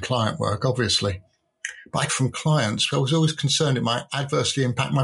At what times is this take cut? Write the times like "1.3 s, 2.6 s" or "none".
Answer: 2.1 s, 2.9 s